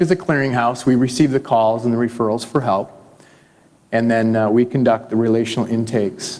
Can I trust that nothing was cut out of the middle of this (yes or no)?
yes